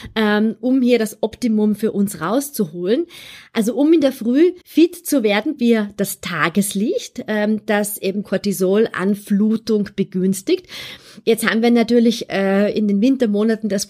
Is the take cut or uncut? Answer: cut